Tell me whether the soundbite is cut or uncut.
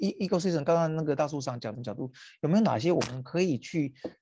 cut